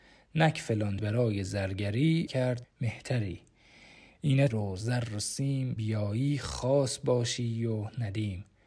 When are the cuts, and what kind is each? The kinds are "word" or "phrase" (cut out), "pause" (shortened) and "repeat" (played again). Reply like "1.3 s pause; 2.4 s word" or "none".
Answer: 1.0 s phrase; 2.3 s word; 2.6 s word; 4.5 s phrase; 5.8 s word